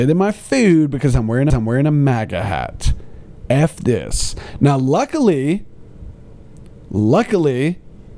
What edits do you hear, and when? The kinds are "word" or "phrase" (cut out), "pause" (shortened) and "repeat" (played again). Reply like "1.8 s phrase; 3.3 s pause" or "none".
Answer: 1.5 s repeat